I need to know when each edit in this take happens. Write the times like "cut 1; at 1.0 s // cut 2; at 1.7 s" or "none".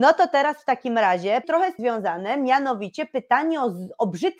cut 1; at 1.4 s // cut 2; at 1.8 s